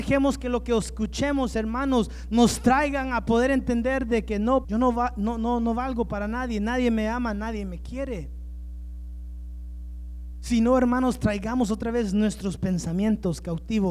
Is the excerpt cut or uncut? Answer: cut